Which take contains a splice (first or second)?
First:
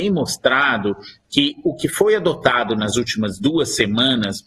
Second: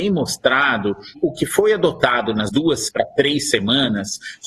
second